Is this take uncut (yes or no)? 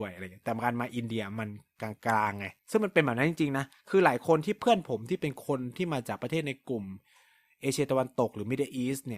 no